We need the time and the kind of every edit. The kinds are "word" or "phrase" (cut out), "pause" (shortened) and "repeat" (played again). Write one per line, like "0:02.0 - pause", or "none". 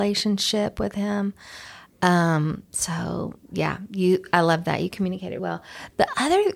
0:03.4 - pause
0:05.4 - word